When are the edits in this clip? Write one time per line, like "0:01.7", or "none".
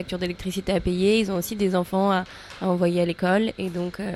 none